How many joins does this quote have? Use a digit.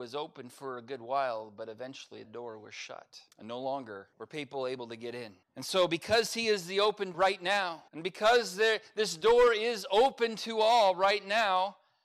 6